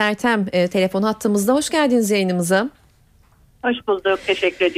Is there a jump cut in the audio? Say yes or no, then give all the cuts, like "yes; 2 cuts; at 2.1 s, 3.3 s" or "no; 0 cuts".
no; 0 cuts